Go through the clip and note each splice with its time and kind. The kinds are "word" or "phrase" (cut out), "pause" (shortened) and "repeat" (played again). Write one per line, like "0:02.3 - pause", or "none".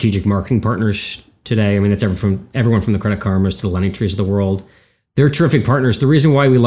none